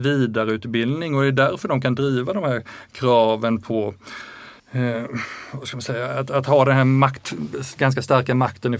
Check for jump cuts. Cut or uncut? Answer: cut